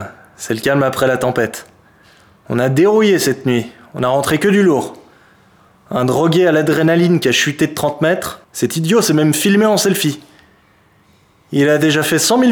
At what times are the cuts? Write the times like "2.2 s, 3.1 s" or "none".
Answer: 8.4 s